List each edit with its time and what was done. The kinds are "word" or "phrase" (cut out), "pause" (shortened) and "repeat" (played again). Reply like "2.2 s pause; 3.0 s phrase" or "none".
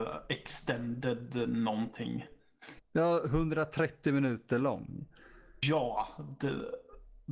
none